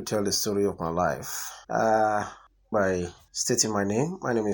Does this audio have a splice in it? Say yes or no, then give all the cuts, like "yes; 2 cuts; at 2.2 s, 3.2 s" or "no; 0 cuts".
yes; 2 cuts; at 1.6 s, 2.7 s